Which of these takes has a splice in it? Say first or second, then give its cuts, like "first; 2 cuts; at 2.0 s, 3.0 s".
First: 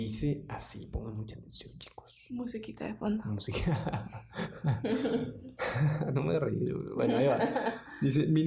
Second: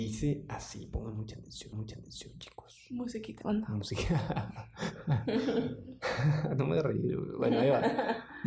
second; 2 cuts; at 1.7 s, 3.4 s